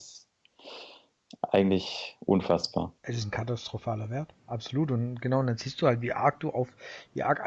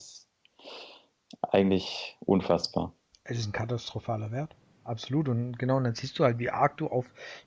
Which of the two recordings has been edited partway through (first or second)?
first